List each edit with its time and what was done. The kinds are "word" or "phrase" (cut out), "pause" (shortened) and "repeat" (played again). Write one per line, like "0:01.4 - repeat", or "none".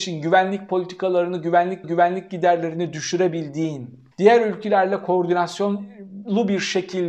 0:01.8 - repeat
0:04.1 - pause

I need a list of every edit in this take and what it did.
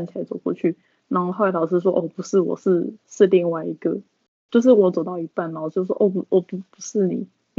none

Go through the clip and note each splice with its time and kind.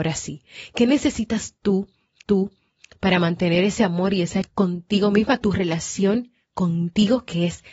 0:02.2 - repeat
0:04.5 - word
0:05.4 - word

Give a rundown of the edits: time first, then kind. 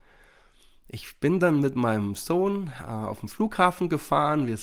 none

